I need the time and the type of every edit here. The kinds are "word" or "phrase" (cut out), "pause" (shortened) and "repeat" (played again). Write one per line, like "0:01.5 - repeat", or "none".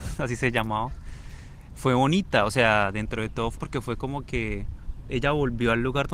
0:03.6 - word